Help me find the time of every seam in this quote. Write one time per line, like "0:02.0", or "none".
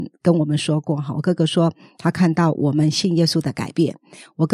none